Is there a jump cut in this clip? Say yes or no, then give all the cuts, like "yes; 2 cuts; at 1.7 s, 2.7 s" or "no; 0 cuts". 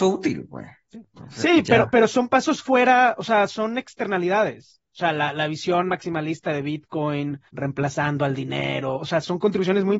yes; 1 cut; at 7.5 s